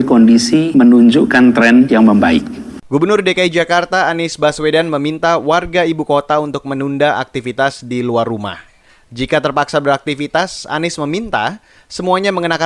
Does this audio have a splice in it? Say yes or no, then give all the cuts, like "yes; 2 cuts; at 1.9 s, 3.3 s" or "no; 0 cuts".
no; 0 cuts